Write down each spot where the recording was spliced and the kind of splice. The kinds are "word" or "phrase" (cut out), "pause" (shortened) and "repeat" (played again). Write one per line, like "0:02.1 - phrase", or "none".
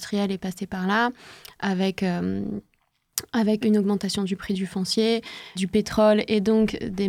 0:03.6 - word
0:05.6 - phrase